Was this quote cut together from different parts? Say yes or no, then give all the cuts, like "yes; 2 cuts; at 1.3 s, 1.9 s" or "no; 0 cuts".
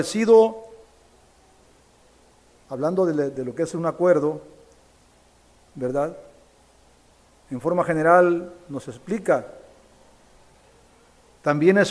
no; 0 cuts